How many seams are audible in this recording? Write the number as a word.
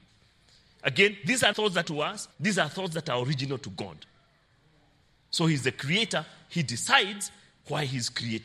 three